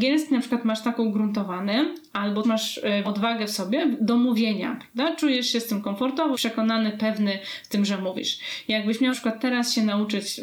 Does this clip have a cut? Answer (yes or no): yes